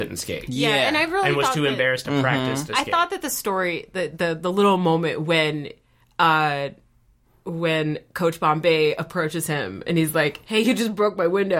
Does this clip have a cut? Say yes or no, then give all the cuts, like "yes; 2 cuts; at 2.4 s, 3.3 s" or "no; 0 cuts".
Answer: no; 0 cuts